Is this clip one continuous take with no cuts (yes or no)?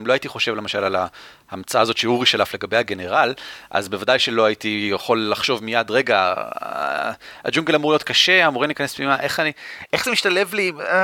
yes